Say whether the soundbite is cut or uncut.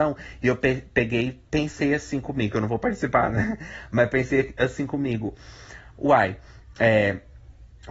uncut